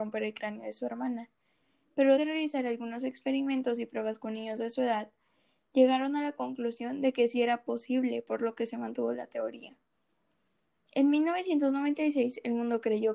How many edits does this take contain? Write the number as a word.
one